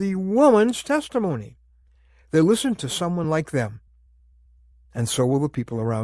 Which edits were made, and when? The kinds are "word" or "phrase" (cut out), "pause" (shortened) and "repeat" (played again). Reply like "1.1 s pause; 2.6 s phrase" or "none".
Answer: none